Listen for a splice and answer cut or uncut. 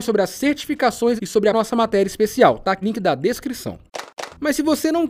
cut